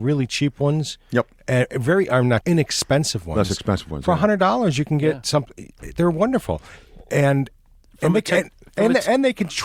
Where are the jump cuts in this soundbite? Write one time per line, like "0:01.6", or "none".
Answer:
0:02.4